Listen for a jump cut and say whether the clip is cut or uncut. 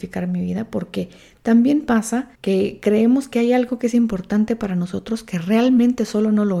cut